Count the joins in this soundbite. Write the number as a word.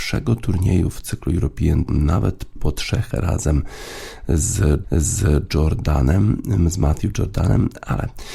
four